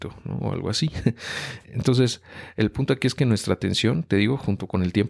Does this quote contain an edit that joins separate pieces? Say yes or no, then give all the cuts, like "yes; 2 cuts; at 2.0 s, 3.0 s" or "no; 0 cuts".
yes; 1 cut; at 1.6 s